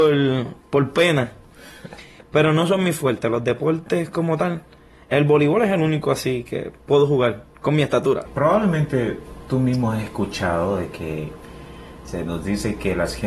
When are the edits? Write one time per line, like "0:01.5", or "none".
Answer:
none